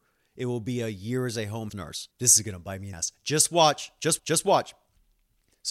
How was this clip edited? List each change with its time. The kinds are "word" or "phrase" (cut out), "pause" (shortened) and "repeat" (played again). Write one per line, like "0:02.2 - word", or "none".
0:01.7 - word
0:02.1 - pause
0:02.9 - word
0:04.2 - repeat